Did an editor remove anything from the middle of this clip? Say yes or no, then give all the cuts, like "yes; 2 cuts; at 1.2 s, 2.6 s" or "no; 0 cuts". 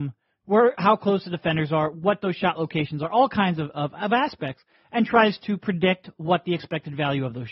no; 0 cuts